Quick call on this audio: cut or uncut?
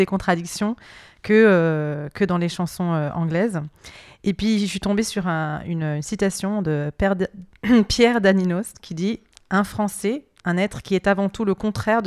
uncut